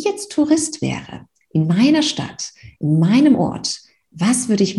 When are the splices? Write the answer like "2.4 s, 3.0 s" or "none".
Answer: none